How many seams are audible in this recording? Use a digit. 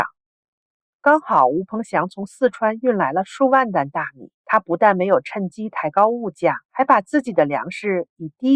2